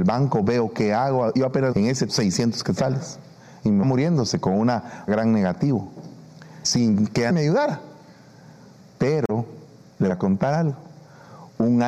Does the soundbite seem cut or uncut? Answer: cut